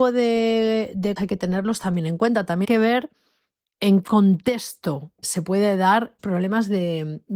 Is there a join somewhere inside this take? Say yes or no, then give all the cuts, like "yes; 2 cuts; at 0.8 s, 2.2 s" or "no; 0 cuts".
yes; 5 cuts; at 1.2 s, 2.6 s, 4.0 s, 5.2 s, 6.2 s